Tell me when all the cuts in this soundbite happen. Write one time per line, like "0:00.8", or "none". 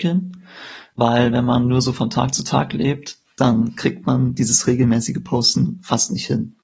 none